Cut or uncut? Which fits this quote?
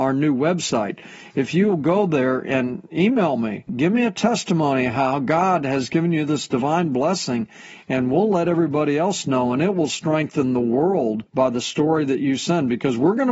uncut